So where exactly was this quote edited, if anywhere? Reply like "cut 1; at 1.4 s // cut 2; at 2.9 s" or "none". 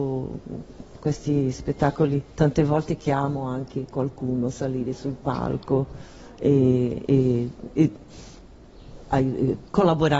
cut 1; at 2.3 s